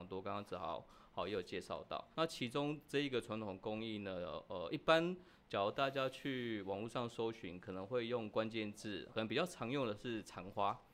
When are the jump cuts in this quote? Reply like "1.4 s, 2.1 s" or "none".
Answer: 2.1 s, 9.1 s